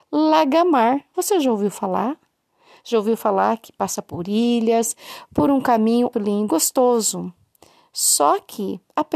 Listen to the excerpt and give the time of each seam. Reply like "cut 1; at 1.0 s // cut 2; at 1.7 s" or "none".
cut 1; at 6.1 s // cut 2; at 6.5 s